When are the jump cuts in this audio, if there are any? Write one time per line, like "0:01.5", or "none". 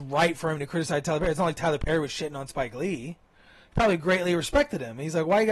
none